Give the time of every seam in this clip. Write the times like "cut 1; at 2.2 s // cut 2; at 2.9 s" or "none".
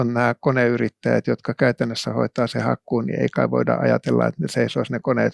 none

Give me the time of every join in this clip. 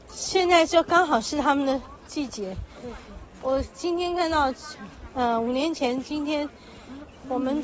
none

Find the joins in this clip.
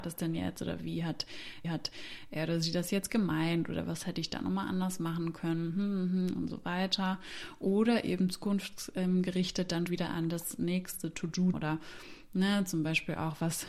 cut 1; at 1.6 s // cut 2; at 9.9 s // cut 3; at 11.5 s

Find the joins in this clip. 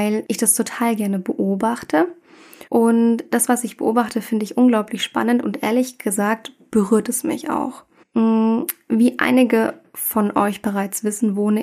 cut 1; at 2.7 s // cut 2; at 8.0 s

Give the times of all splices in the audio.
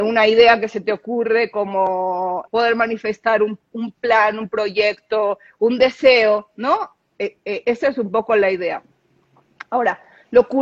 cut 1; at 2.5 s

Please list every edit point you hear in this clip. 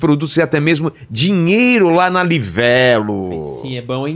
none

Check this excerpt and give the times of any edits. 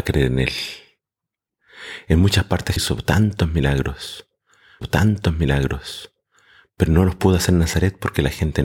cut 1; at 2.8 s // cut 2; at 4.8 s

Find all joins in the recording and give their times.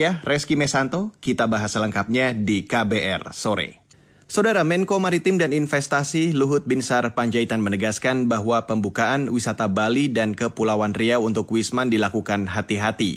none

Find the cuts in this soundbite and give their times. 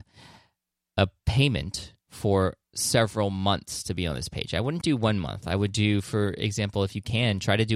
cut 1; at 2.0 s // cut 2; at 4.8 s

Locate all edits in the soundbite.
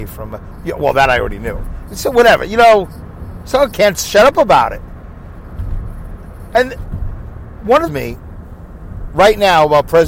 cut 1; at 3.7 s // cut 2; at 7.9 s

